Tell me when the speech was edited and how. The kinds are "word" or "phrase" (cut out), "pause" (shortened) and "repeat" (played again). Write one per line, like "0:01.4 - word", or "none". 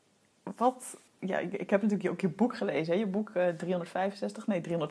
0:01.1 - pause